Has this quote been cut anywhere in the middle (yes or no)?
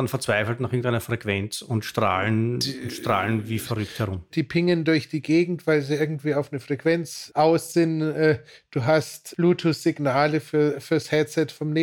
no